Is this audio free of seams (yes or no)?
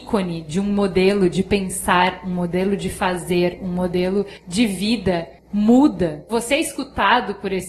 no